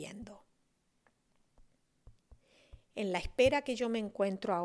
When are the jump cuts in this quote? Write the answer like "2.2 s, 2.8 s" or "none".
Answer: none